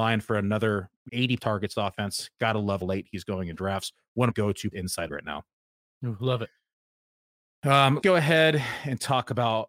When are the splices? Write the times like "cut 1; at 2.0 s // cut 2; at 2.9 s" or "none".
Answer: cut 1; at 1.1 s // cut 2; at 1.4 s // cut 3; at 1.7 s // cut 4; at 2.8 s // cut 5; at 4.3 s // cut 6; at 4.7 s // cut 7; at 5.1 s // cut 8; at 8.0 s